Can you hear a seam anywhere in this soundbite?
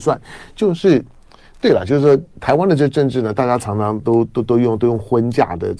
no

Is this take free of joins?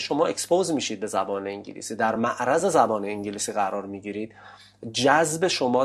yes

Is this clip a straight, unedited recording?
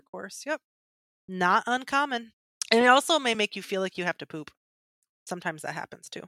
yes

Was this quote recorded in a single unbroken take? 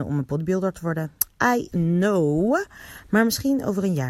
no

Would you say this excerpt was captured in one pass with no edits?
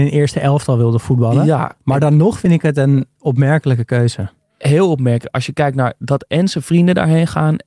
yes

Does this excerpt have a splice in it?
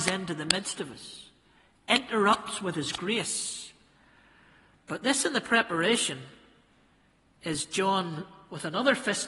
no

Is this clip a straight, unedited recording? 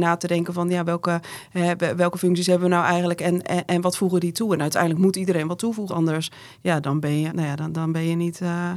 no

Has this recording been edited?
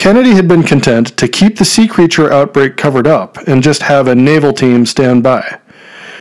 no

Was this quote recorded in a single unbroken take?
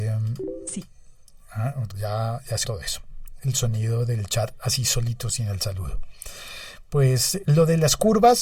no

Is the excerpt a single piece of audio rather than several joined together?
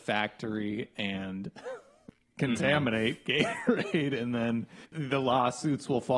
no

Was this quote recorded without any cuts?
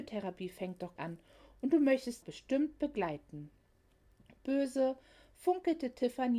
no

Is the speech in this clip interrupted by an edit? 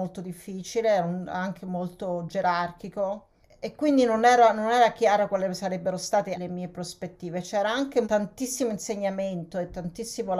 no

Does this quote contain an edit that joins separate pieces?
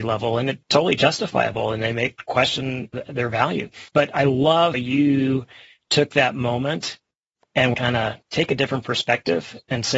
yes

